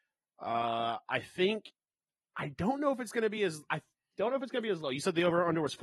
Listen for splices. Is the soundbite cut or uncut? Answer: uncut